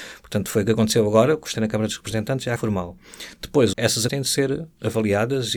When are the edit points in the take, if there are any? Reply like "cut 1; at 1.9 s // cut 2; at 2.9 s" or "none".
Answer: cut 1; at 1.5 s // cut 2; at 2.6 s // cut 3; at 3.7 s // cut 4; at 4.1 s